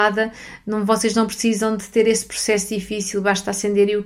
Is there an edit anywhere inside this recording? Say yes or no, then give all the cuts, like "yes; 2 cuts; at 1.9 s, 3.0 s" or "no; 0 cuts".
no; 0 cuts